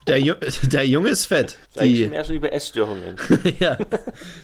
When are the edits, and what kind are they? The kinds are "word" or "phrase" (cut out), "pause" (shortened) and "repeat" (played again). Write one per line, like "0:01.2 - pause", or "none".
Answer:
0:01.6 - pause